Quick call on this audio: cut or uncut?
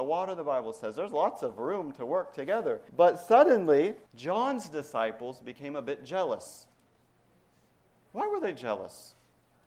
cut